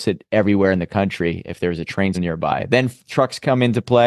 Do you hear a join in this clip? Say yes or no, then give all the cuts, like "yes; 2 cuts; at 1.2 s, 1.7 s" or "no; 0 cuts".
yes; 1 cut; at 2.1 s